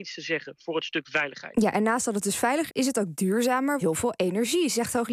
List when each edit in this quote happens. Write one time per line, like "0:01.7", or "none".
0:02.7
0:03.8